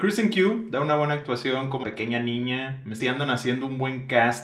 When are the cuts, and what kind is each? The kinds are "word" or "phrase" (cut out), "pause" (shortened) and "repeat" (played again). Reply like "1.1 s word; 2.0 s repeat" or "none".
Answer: 1.8 s word; 3.0 s phrase